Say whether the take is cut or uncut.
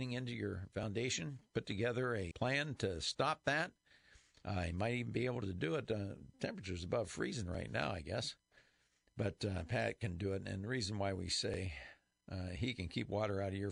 cut